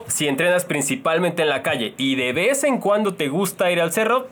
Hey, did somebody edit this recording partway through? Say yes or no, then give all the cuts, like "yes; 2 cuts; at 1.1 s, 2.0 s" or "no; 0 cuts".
no; 0 cuts